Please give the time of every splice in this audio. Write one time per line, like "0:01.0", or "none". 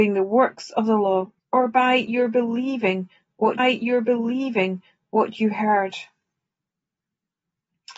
0:01.4
0:03.6